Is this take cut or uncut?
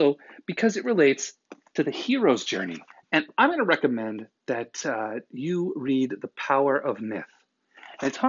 cut